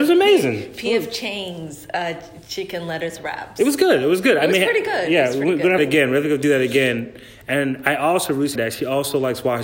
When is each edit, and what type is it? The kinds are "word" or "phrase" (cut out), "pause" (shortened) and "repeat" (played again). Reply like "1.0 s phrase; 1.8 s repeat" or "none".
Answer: 5.8 s phrase; 8.5 s word